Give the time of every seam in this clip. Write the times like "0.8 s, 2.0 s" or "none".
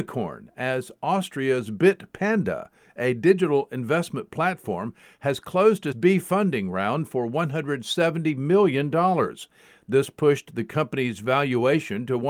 5.9 s